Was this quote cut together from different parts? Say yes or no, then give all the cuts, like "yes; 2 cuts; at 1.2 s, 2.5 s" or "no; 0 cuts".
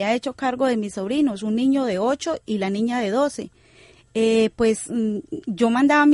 no; 0 cuts